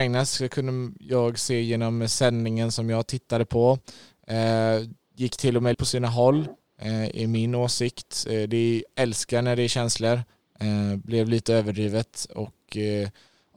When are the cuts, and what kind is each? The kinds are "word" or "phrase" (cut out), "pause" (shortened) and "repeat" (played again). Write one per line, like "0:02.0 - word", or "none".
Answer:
0:05.7 - phrase
0:08.9 - word